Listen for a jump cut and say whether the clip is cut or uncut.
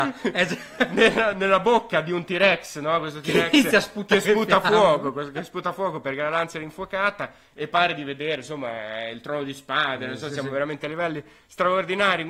uncut